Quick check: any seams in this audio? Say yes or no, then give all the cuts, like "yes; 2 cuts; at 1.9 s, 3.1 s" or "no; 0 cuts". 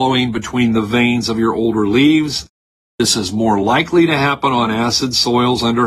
no; 0 cuts